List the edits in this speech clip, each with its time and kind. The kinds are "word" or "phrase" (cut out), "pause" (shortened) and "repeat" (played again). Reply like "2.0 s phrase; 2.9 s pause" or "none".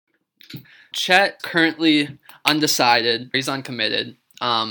0.9 s word; 1.4 s word; 3.3 s word